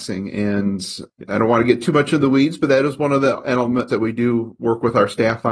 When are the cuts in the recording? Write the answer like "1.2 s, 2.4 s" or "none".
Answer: 3.9 s